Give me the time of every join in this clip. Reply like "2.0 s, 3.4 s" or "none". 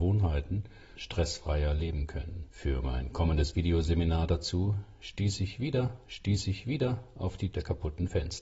0.9 s, 2.5 s, 6.0 s, 7.5 s